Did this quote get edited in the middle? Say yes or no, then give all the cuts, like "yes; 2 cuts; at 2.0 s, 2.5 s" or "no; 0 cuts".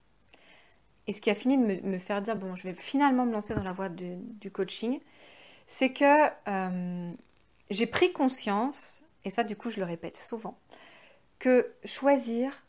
no; 0 cuts